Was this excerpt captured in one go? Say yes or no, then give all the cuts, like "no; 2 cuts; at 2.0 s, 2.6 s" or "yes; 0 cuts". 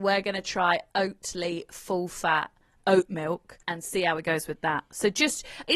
no; 1 cut; at 3.6 s